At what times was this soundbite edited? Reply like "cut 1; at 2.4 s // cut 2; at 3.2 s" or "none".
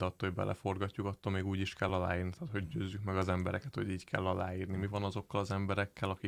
none

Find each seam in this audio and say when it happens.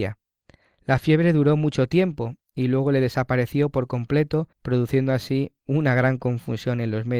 cut 1; at 4.5 s // cut 2; at 5.6 s

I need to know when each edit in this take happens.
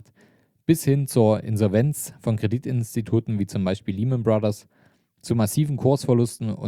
none

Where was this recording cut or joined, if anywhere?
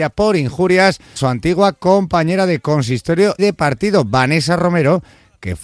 cut 1; at 1.2 s // cut 2; at 3.4 s

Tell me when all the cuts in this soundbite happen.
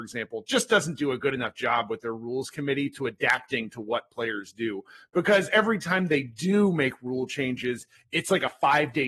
none

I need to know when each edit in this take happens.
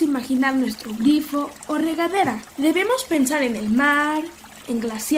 cut 1; at 2.5 s

